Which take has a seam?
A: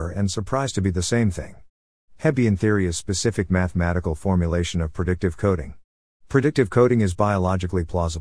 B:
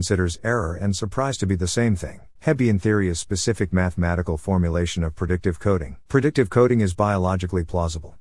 B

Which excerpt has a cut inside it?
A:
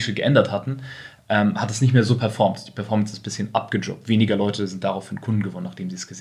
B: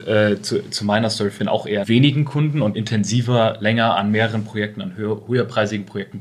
B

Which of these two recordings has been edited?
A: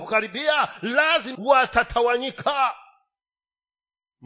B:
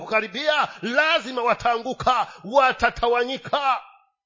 A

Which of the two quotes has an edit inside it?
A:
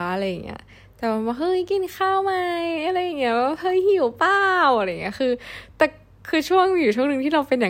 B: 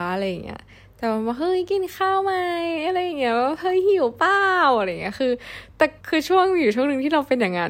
B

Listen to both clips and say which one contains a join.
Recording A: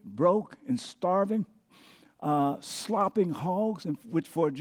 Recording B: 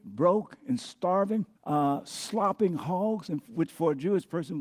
B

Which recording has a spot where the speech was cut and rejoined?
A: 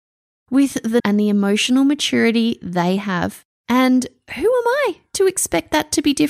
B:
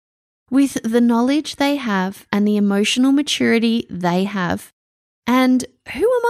A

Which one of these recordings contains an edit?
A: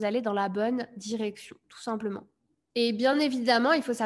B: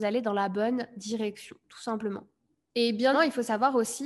B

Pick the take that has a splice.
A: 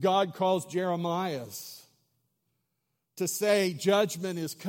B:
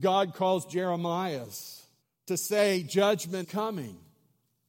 B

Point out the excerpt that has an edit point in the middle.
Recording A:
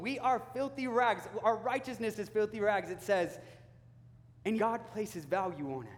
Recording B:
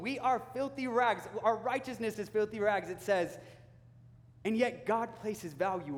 A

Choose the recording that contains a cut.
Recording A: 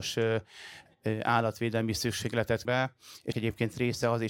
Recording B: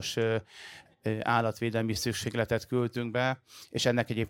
A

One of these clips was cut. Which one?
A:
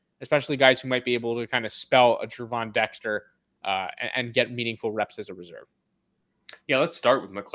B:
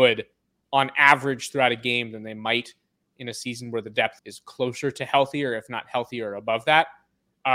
B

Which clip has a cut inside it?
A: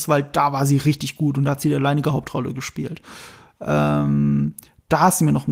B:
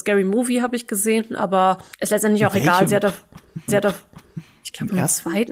B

